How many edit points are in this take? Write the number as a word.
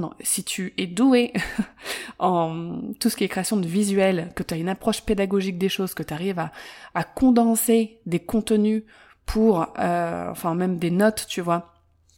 zero